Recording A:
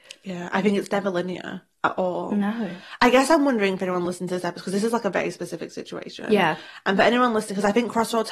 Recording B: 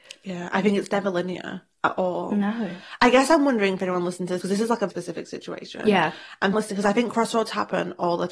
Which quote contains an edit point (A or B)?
B